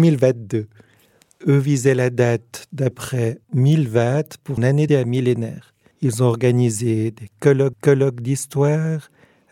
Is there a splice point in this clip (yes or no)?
yes